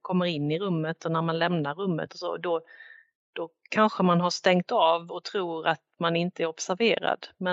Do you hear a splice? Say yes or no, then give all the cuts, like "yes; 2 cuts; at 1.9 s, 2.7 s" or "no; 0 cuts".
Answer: no; 0 cuts